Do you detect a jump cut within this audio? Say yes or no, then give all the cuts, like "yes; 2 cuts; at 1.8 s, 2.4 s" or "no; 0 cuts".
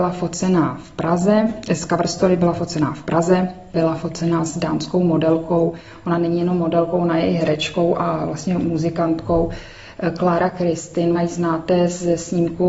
yes; 1 cut; at 11.1 s